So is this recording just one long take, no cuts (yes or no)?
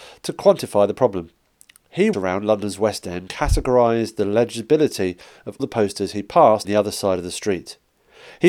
no